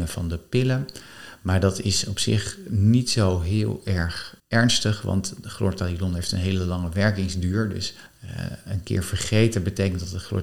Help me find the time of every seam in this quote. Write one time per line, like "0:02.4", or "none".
0:04.4
0:08.1